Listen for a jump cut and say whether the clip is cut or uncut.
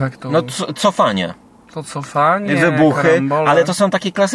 uncut